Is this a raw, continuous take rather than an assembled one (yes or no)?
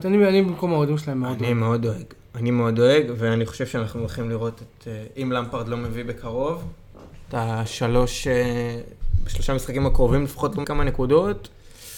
no